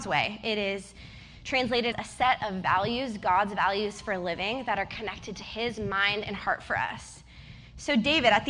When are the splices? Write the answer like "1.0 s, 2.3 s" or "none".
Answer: 1.9 s

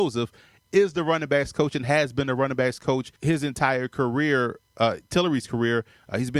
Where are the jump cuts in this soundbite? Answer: 3.2 s

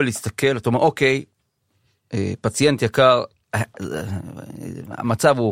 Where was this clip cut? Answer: none

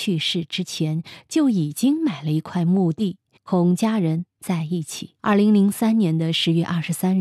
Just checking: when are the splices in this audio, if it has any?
3.4 s, 5.2 s

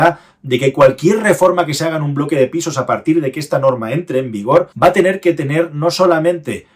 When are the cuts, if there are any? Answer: 4.7 s

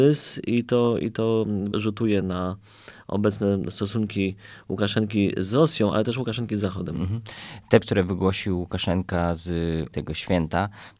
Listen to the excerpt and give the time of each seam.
1.7 s, 7.8 s, 9.9 s

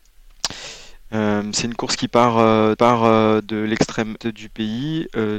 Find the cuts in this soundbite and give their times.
2.8 s, 4.2 s

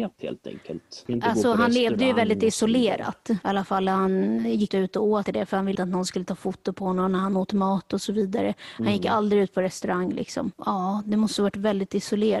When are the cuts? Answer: 4.7 s, 5.3 s, 5.8 s

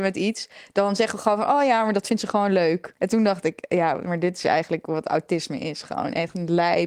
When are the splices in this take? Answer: 3.0 s

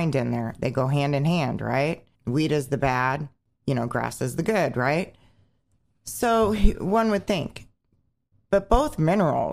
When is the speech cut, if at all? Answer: 2.1 s, 3.4 s

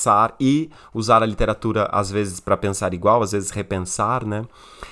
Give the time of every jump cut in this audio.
none

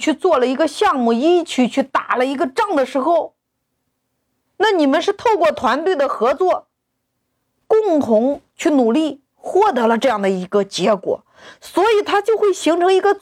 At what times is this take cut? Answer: none

